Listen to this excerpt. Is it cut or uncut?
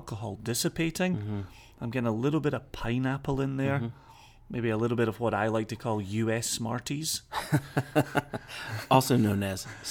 uncut